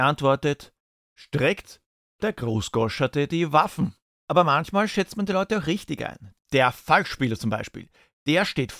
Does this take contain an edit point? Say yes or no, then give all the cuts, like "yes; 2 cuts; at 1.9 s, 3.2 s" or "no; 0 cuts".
no; 0 cuts